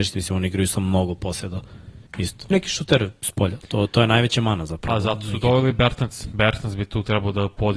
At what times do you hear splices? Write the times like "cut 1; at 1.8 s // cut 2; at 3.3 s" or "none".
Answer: cut 1; at 2.1 s // cut 2; at 2.5 s